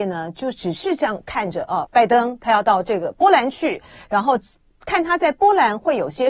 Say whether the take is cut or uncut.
cut